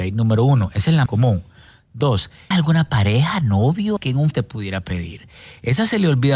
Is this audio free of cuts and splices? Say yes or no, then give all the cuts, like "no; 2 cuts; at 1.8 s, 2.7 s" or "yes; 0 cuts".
no; 4 cuts; at 1.1 s, 2.5 s, 4.0 s, 4.3 s